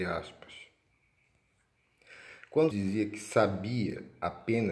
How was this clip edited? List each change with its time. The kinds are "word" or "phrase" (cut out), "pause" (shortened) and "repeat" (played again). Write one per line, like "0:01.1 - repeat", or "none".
0:02.7 - word